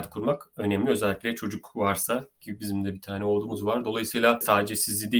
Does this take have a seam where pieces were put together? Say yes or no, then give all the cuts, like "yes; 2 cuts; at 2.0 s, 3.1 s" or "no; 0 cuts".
no; 0 cuts